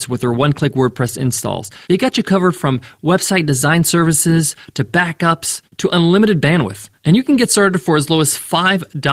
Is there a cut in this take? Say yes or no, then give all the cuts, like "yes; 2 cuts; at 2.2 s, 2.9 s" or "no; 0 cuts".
yes; 3 cuts; at 1.8 s, 5.7 s, 7.0 s